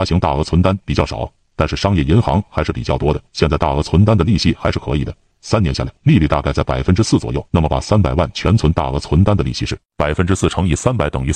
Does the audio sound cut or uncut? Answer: cut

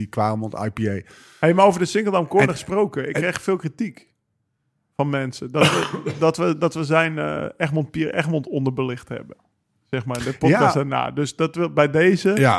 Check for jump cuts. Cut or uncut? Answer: uncut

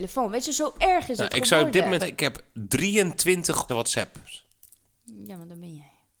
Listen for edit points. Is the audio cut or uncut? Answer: cut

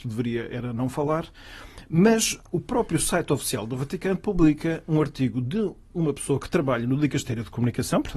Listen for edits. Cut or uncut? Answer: uncut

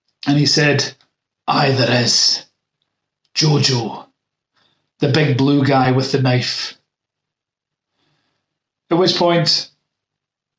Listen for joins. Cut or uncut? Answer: uncut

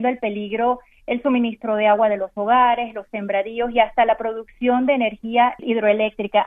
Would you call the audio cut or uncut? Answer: uncut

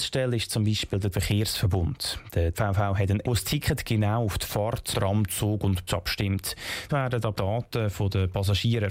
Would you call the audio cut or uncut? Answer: cut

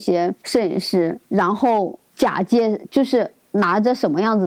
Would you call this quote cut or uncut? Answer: cut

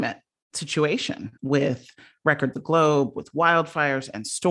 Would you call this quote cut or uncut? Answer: cut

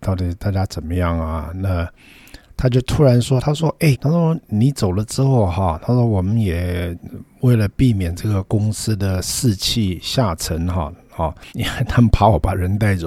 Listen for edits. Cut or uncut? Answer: cut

